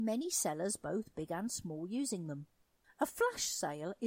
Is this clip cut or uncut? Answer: cut